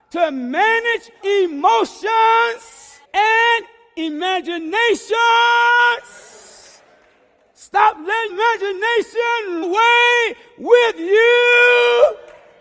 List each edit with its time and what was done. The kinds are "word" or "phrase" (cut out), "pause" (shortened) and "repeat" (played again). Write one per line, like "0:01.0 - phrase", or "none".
0:01.2 - word
0:03.0 - pause
0:08.3 - word
0:09.6 - word